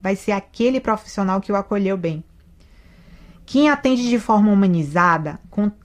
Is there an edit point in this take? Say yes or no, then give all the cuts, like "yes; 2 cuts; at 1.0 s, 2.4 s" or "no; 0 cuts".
no; 0 cuts